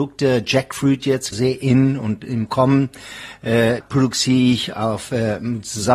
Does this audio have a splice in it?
yes; 2 cuts; at 1.3 s, 3.8 s

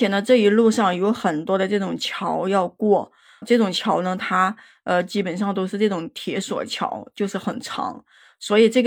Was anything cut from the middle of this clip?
yes; 1 cut; at 3.4 s

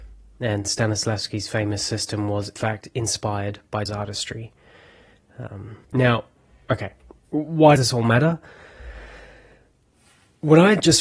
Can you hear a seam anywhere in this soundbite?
yes; 4 cuts; at 2.6 s, 3.9 s, 5.8 s, 7.8 s

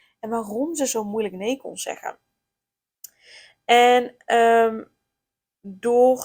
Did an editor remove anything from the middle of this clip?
no; 0 cuts

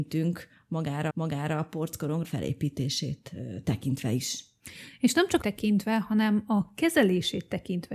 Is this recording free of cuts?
no; 3 cuts; at 1.1 s, 2.2 s, 5.4 s

